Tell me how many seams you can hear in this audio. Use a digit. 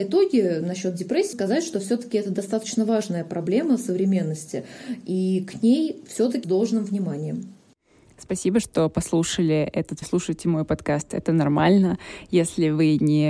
4